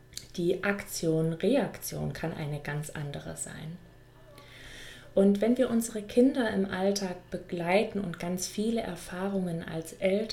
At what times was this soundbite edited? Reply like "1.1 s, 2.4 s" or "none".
none